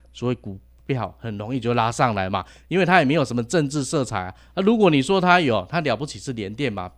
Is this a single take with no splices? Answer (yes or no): yes